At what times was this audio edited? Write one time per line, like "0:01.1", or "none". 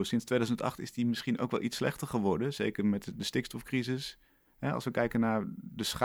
none

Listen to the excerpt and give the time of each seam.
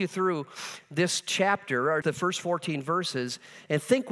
0:02.0

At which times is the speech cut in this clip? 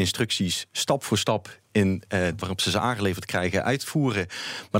0:02.4

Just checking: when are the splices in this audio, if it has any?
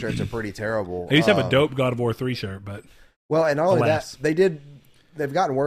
none

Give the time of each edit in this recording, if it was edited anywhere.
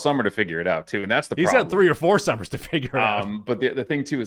none

